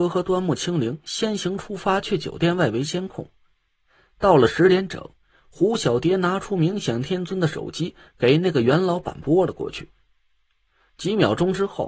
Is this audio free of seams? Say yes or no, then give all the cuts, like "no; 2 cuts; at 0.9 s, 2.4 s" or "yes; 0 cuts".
yes; 0 cuts